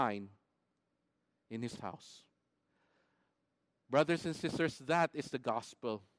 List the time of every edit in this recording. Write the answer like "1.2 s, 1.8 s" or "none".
1.8 s